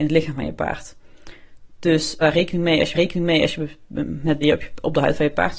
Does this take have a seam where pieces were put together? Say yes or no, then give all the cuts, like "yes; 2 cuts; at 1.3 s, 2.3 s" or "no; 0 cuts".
yes; 3 cuts; at 2.2 s, 2.9 s, 4.4 s